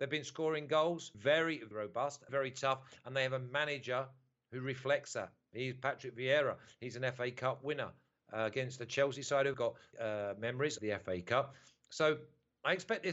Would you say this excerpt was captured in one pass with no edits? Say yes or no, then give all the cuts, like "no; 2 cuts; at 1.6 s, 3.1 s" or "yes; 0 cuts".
no; 6 cuts; at 1.1 s, 1.7 s, 2.3 s, 9.5 s, 9.9 s, 10.8 s